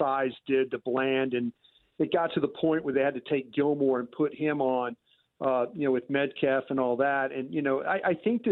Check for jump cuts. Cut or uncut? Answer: uncut